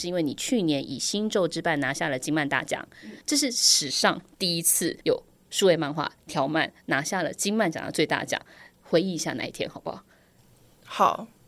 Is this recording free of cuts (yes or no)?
no